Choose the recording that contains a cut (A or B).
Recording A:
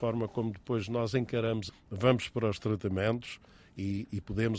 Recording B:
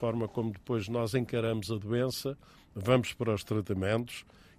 A